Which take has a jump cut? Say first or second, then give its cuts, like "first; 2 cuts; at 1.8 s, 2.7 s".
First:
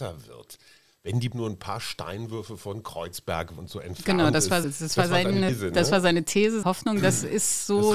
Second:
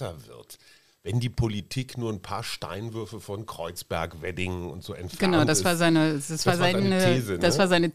first; 5 cuts; at 1.3 s, 3.6 s, 4.6 s, 5.5 s, 6.6 s